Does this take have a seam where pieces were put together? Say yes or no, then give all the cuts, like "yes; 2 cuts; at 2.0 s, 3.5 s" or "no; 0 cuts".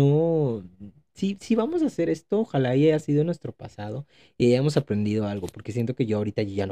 no; 0 cuts